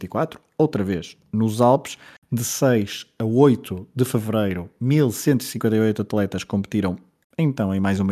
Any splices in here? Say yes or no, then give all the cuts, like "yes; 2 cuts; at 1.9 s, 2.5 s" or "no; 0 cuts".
no; 0 cuts